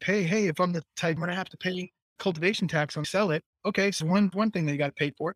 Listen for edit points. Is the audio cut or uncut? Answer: cut